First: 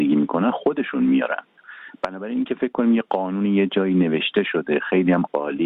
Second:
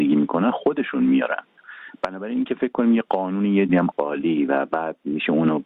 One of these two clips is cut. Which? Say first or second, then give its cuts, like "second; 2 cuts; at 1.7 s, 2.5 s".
second; 1 cut; at 3.7 s